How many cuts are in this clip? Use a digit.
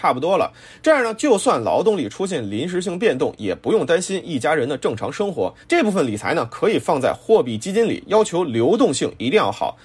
1